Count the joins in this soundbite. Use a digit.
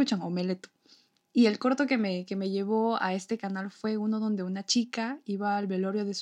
0